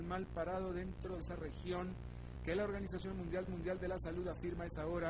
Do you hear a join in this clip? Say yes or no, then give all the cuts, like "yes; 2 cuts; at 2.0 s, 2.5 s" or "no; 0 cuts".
yes; 2 cuts; at 1.2 s, 3.5 s